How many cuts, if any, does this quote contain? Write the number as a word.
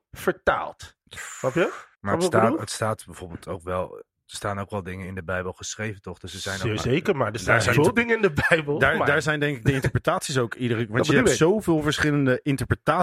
three